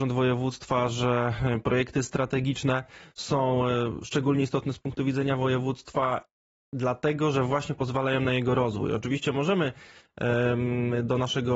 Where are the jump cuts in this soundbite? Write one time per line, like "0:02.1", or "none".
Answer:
none